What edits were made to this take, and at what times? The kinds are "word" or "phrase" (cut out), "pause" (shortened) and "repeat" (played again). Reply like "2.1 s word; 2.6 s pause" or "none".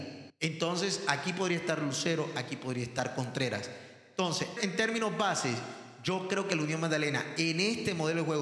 4.6 s word